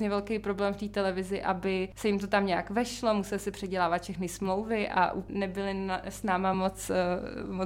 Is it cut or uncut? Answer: uncut